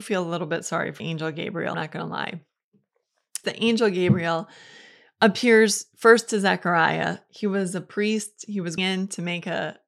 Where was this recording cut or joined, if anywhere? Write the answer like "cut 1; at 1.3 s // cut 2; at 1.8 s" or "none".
cut 1; at 1.0 s // cut 2; at 1.7 s // cut 3; at 3.4 s // cut 4; at 8.8 s